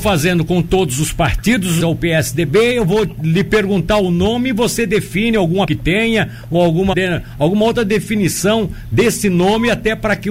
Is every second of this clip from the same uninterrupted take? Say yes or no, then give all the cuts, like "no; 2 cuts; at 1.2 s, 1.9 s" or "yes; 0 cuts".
no; 3 cuts; at 1.8 s, 5.6 s, 6.9 s